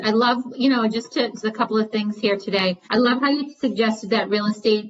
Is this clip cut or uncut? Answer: cut